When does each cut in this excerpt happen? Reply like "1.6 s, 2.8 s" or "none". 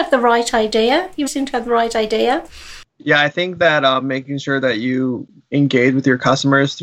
1.3 s, 2.9 s